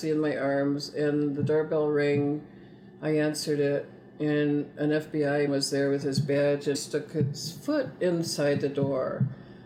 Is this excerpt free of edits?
no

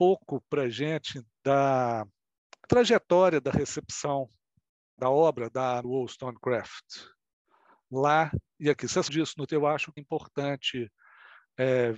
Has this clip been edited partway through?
yes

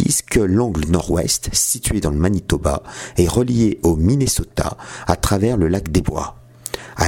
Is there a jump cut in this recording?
no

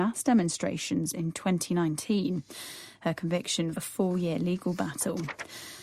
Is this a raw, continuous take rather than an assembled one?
no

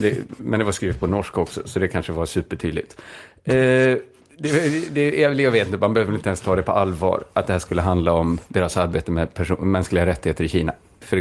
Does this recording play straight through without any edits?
yes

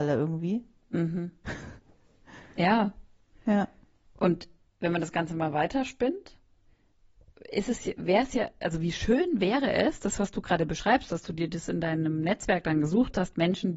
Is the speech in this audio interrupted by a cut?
no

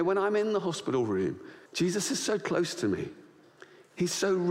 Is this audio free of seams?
no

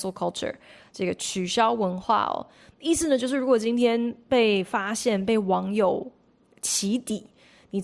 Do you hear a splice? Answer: no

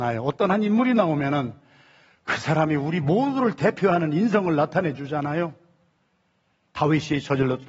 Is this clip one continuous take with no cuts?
yes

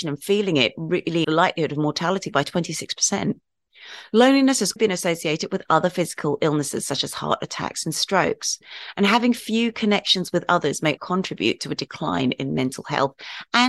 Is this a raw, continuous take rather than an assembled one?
no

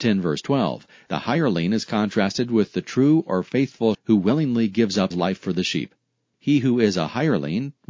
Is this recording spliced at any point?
yes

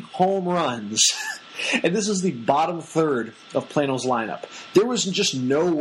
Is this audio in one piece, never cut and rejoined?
yes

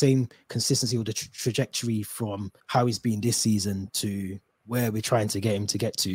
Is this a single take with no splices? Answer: no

